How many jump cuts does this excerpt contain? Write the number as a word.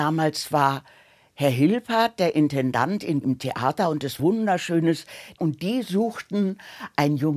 three